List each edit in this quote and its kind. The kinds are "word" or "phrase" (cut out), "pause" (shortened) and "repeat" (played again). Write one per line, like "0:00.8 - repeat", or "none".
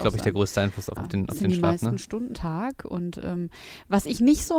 0:01.0 - word
0:02.3 - word

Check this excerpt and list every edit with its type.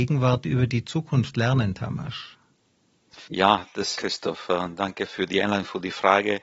0:03.3 - pause
0:04.0 - phrase
0:05.1 - word

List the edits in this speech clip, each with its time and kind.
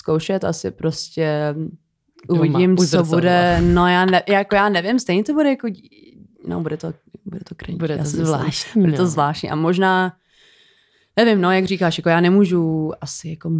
none

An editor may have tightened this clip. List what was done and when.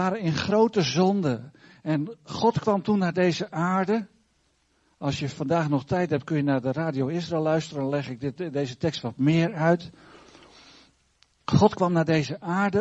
none

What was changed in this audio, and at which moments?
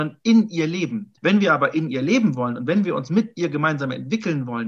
0:01.2 - pause

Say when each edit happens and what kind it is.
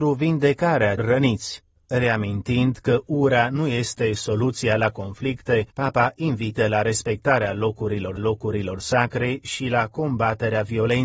0:01.0 - word
0:05.7 - pause
0:08.2 - repeat

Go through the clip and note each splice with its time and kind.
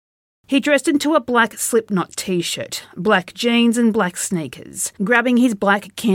0:05.0 - pause

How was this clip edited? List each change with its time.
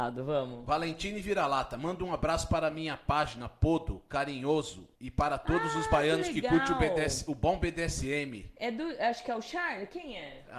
0:05.0 - pause
0:08.6 - pause

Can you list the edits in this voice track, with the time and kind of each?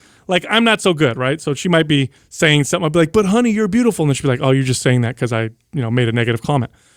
0:02.2 - pause

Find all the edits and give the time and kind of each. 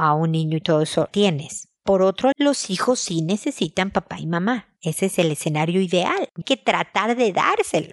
0:01.1 - word
0:02.3 - word
0:06.4 - word

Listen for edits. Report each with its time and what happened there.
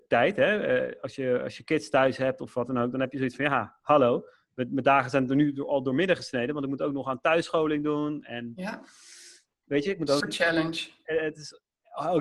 0:10.2 - word

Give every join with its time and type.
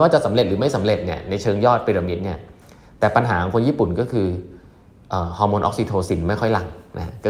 none

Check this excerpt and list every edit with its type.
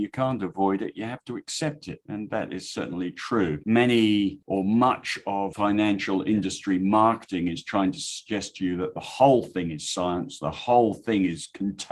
none

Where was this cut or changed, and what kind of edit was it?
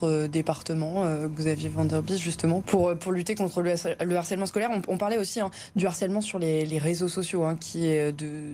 0:02.6 - word

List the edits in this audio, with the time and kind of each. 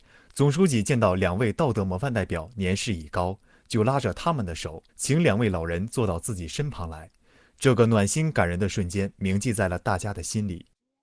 0:04.9 - pause

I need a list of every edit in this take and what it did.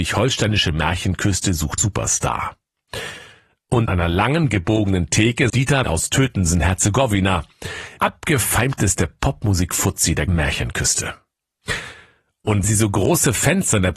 0:01.8 - word
0:03.9 - word
0:05.5 - word
0:05.8 - word
0:08.0 - word
0:10.3 - word
0:12.6 - word

